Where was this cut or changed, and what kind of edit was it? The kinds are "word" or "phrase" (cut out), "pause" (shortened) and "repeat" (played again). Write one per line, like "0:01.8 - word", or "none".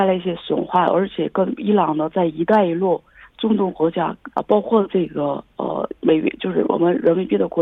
0:04.3 - pause
0:06.0 - pause

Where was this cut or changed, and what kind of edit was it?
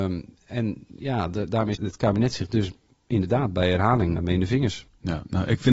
0:01.7 - word
0:04.2 - word

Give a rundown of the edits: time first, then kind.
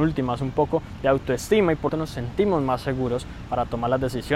0:01.9 - phrase

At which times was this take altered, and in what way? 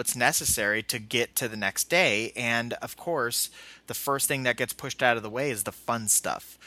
none

